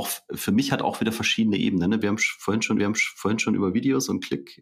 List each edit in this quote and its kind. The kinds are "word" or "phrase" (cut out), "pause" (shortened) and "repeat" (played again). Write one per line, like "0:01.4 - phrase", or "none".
0:02.8 - repeat